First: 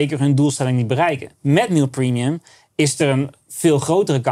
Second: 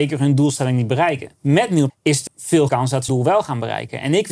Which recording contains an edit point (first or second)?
second